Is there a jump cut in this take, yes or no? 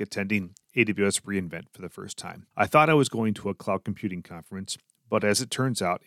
yes